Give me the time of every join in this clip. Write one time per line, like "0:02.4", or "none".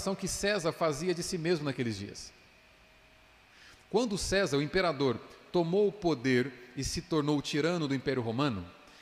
none